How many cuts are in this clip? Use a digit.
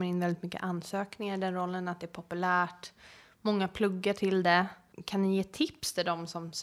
0